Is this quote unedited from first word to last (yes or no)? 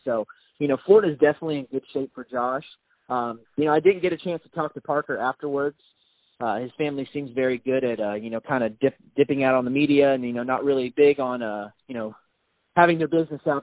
yes